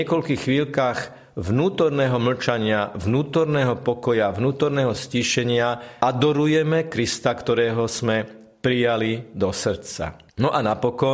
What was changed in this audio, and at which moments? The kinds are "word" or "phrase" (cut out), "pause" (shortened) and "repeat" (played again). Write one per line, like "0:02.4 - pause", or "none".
none